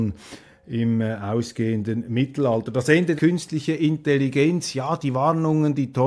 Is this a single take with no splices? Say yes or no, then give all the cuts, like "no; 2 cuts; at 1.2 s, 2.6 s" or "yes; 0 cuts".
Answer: no; 1 cut; at 3.2 s